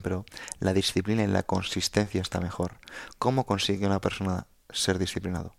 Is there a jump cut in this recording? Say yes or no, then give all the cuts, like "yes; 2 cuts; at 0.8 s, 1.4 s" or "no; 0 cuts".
no; 0 cuts